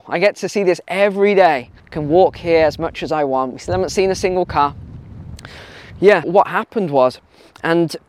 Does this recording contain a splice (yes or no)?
yes